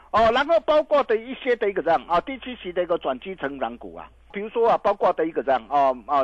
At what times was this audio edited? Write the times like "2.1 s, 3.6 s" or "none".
4.3 s